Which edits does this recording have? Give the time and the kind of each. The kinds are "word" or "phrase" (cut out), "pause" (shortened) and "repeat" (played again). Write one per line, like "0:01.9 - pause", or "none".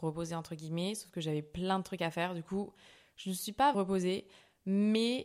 0:03.7 - word

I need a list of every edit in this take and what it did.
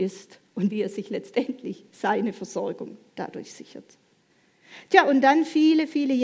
none

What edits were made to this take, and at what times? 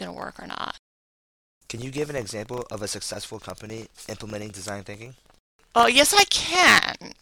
none

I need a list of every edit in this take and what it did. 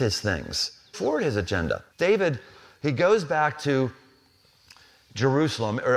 0:00.9 - phrase
0:01.9 - pause

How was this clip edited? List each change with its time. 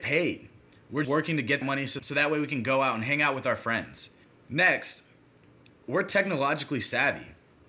0:01.0 - word
0:01.6 - word
0:04.2 - pause

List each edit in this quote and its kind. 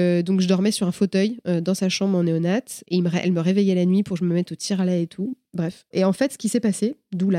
none

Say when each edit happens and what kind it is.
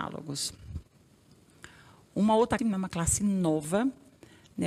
0:02.6 - word

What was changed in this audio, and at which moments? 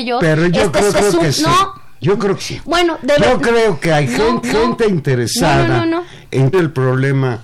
0:00.9 - repeat
0:02.4 - word
0:04.4 - repeat
0:06.5 - word

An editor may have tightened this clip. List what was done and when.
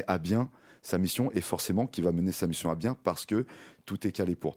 none

